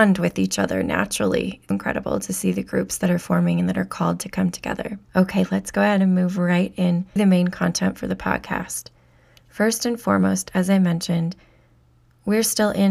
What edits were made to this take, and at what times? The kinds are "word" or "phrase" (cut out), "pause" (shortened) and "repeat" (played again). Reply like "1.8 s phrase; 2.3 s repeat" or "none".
1.7 s word; 5.0 s pause; 7.2 s word